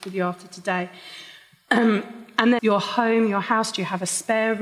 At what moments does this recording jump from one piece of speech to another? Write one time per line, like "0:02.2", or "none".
0:02.6